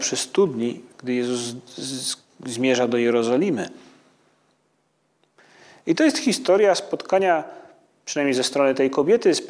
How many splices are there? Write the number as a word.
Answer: one